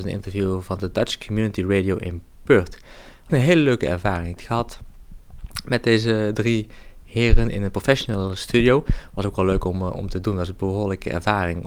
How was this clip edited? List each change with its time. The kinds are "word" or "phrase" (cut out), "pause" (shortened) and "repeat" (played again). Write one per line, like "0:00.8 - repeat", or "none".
0:03.3 - word
0:04.4 - phrase